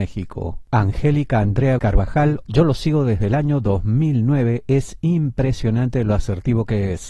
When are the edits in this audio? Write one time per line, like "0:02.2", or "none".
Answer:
0:01.8
0:02.4